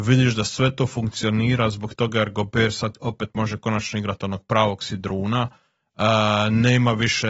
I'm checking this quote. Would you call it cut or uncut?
uncut